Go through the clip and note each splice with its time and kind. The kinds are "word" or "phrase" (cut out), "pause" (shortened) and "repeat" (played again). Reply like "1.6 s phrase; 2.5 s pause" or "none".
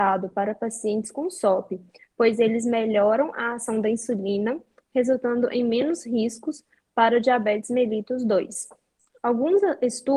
none